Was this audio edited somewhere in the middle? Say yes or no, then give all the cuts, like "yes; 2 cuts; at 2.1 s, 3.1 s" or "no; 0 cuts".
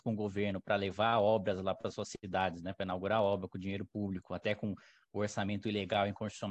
no; 0 cuts